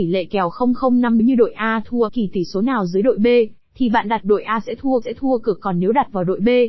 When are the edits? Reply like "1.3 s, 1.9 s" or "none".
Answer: 1.2 s, 2.1 s, 4.2 s, 5.0 s